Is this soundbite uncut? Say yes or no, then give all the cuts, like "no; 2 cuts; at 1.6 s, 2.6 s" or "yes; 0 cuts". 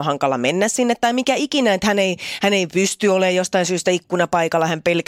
yes; 0 cuts